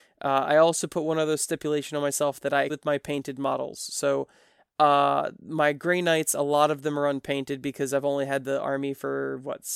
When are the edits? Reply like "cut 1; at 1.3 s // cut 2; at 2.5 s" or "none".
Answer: cut 1; at 2.7 s